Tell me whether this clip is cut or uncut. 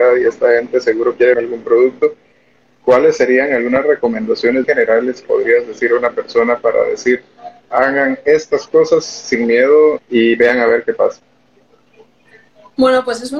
cut